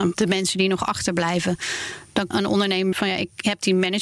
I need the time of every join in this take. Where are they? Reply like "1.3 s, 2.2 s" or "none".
2.3 s, 2.9 s